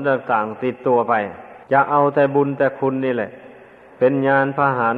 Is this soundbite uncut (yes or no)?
no